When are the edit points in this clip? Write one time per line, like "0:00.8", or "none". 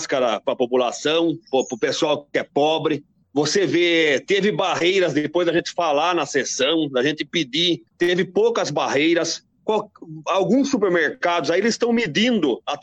0:01.5
0:03.2
0:07.9